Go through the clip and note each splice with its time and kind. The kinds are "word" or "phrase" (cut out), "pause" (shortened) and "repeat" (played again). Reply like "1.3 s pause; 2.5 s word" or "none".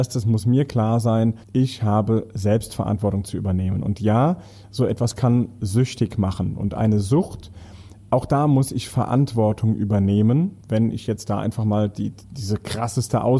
1.4 s pause; 10.6 s pause